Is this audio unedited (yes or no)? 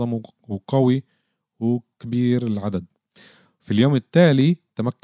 yes